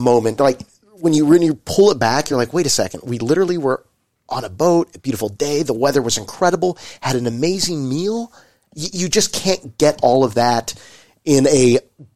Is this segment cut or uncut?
uncut